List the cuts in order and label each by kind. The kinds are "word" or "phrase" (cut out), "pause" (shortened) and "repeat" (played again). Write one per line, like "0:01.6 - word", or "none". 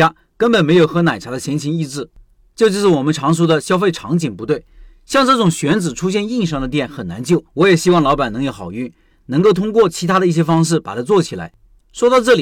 0:07.5 - pause